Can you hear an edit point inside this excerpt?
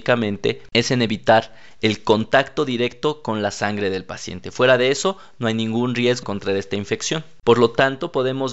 yes; 1 cut; at 6.2 s

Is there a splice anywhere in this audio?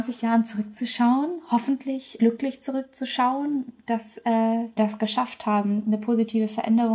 yes; 2 cuts; at 2.2 s, 4.8 s

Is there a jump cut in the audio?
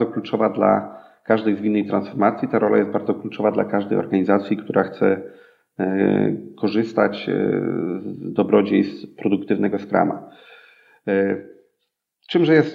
no; 0 cuts

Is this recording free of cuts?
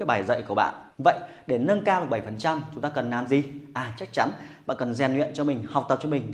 no; 1 cut; at 0.9 s

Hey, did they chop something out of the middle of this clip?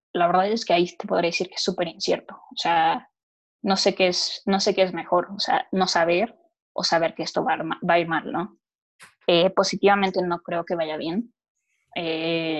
no; 0 cuts

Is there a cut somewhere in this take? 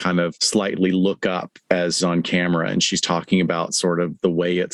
yes; 1 cut; at 2.0 s

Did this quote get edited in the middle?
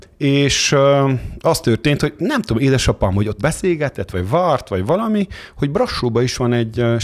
yes; 1 cut; at 3.4 s

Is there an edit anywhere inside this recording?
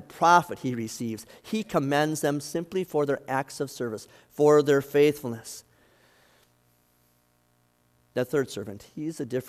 no; 0 cuts

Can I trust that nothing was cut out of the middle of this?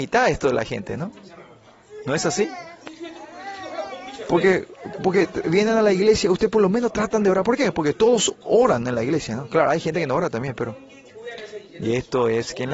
yes; 0 cuts

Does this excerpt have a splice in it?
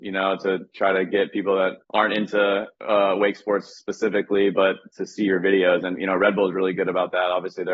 yes; 1 cut; at 1.8 s

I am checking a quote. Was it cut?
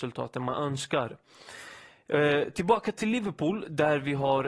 no; 0 cuts

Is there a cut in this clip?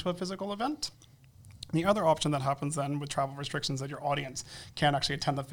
no; 0 cuts

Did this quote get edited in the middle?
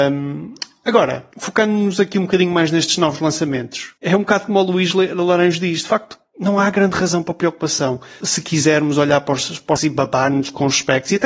yes; 4 cuts; at 1.3 s, 4.0 s, 8.2 s, 9.8 s

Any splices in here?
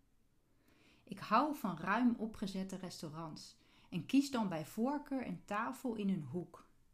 no; 0 cuts

